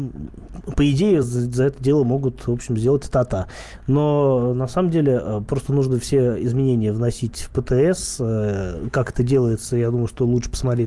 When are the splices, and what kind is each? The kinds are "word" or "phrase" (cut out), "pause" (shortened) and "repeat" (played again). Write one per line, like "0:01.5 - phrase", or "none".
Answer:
none

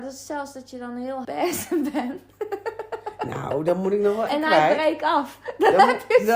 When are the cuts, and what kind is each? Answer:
0:01.2 - phrase
0:04.3 - word

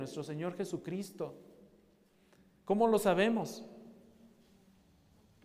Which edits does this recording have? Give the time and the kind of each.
none

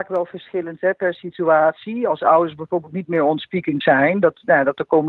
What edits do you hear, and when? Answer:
0:03.8 - word

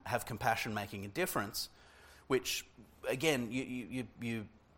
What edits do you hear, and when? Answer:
none

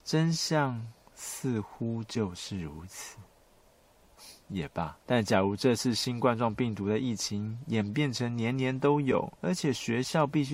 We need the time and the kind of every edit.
0:04.4 - pause
0:05.0 - pause
0:09.4 - pause

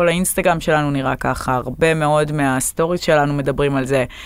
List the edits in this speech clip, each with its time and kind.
none

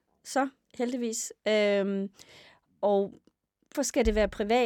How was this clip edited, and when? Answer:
0:03.7 - word

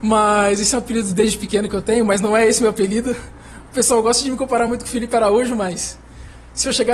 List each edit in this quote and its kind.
none

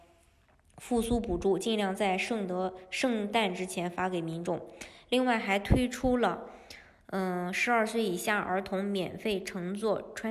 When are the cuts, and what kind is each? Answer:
none

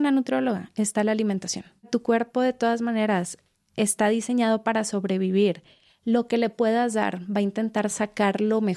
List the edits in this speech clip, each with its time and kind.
none

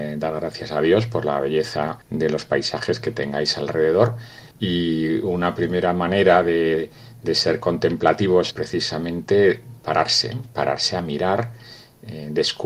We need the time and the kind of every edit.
0:02.0 - pause
0:04.5 - pause
0:08.5 - phrase

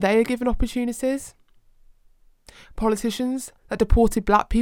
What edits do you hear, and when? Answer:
0:03.6 - pause

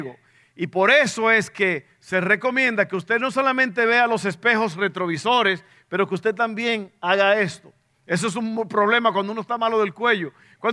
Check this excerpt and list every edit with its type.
none

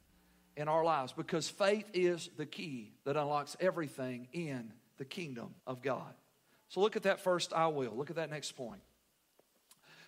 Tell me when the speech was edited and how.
0:03.0 - pause
0:05.6 - pause

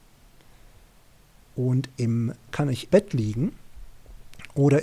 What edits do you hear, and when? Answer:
0:02.5 - word
0:02.9 - word

